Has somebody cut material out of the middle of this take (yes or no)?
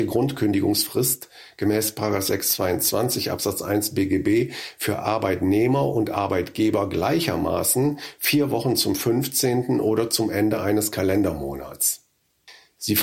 no